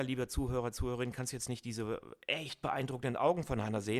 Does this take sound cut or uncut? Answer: uncut